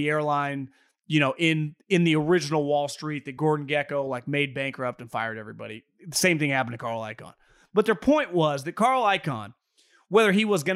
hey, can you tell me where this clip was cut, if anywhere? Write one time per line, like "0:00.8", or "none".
none